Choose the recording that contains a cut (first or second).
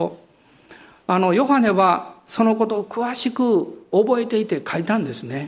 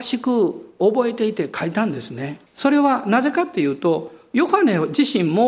second